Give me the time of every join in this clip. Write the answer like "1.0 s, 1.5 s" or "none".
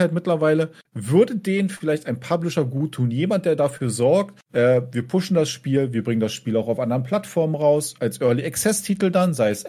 4.4 s, 8.0 s